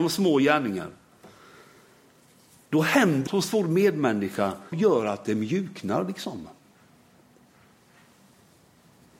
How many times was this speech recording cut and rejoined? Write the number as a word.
two